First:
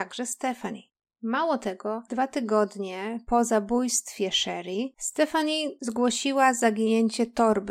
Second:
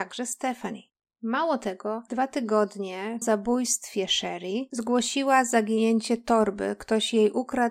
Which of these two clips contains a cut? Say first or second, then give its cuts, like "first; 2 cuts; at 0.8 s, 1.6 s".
second; 2 cuts; at 3.2 s, 4.7 s